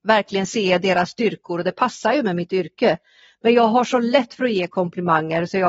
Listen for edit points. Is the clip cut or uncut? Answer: uncut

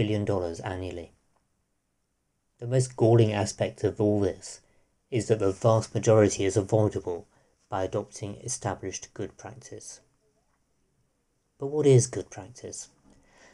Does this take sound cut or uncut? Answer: uncut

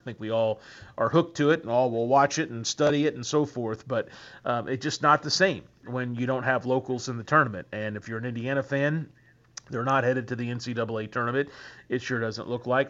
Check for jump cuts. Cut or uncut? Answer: uncut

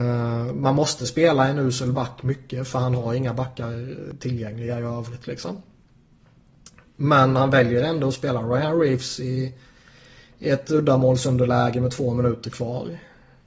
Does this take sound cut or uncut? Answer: uncut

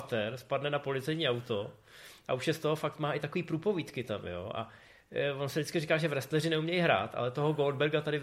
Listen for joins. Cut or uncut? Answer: uncut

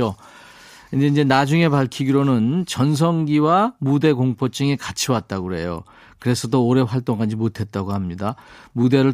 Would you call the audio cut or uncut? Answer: uncut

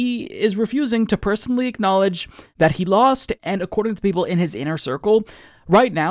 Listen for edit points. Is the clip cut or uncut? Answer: uncut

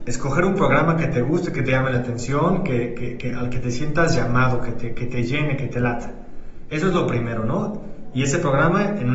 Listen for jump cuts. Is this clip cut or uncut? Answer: uncut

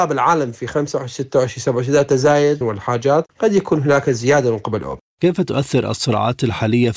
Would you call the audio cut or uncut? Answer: cut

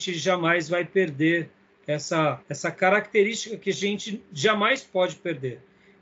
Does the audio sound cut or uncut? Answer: cut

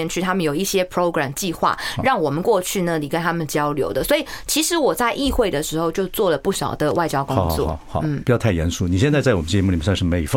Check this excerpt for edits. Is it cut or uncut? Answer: uncut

